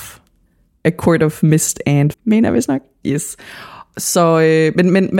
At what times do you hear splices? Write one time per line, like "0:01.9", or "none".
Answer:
0:02.1